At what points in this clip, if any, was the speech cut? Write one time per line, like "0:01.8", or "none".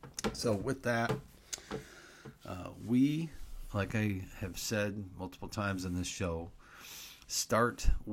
none